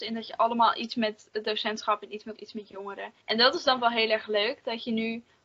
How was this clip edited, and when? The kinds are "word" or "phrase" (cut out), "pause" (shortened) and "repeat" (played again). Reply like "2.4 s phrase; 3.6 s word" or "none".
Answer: 2.3 s word; 3.2 s pause